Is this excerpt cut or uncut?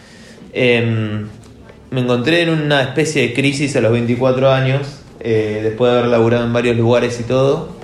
uncut